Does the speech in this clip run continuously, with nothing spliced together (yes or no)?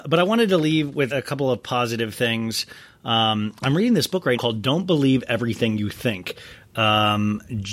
no